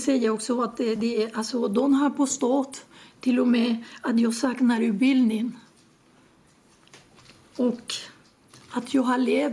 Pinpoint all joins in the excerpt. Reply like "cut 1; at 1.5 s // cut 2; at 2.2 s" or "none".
none